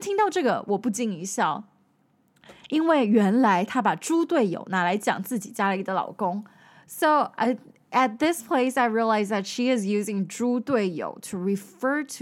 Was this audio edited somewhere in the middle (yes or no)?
no